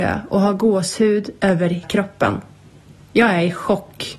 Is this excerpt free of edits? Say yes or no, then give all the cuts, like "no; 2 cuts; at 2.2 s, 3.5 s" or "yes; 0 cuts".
no; 1 cut; at 1.8 s